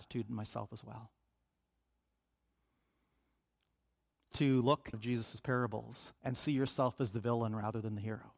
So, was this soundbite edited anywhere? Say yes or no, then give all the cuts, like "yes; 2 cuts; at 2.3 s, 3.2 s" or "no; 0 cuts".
yes; 3 cuts; at 4.3 s, 4.9 s, 6.2 s